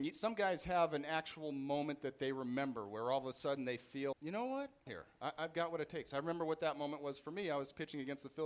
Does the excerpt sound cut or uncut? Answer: cut